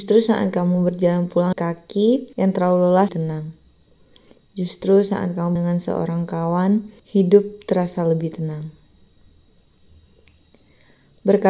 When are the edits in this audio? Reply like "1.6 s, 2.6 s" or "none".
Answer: 1.5 s, 2.3 s, 3.1 s, 5.6 s, 7.0 s